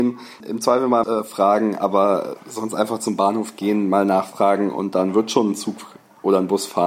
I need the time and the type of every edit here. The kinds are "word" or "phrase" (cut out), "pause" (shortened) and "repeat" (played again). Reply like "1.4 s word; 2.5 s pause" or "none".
1.0 s phrase